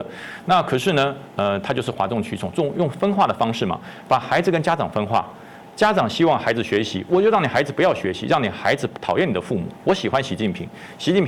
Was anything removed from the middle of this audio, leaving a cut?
no; 0 cuts

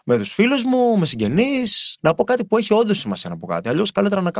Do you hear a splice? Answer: yes; 1 cut; at 2.0 s

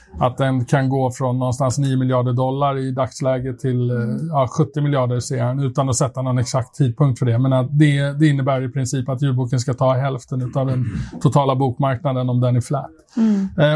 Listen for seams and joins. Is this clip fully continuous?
yes; 0 cuts

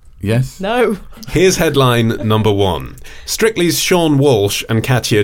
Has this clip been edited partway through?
no; 0 cuts

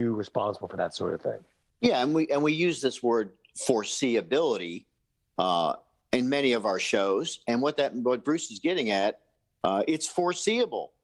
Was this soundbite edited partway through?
no; 0 cuts

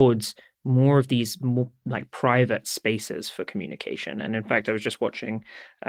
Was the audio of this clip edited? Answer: no; 0 cuts

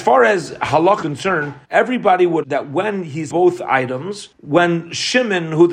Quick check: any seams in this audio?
yes; 5 cuts; at 1.0 s, 1.6 s, 2.4 s, 3.3 s, 4.3 s

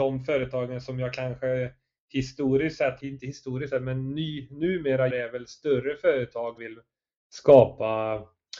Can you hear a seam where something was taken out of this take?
yes; 3 cuts; at 3.0 s, 5.1 s, 6.6 s

